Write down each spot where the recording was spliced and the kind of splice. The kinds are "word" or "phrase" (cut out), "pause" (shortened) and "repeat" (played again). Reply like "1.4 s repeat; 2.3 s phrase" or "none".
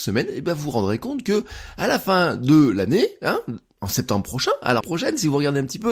4.8 s word